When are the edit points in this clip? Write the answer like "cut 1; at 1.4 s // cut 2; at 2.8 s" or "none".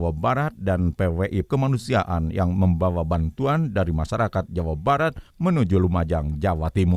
cut 1; at 1.5 s